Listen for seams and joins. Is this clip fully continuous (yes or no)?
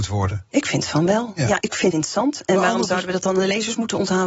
no